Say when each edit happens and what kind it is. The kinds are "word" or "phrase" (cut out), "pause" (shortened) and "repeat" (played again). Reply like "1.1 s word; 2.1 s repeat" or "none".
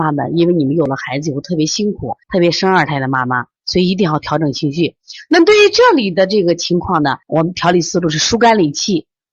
2.2 s pause; 3.6 s pause; 7.2 s pause